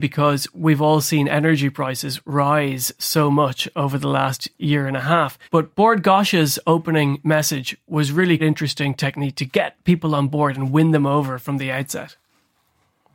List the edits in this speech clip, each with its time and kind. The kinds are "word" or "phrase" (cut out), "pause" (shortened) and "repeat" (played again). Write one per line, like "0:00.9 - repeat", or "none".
0:05.4 - pause
0:08.4 - word